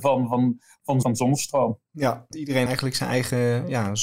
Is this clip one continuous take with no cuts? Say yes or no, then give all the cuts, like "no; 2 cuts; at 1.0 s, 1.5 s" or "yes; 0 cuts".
no; 3 cuts; at 1.0 s, 2.3 s, 2.7 s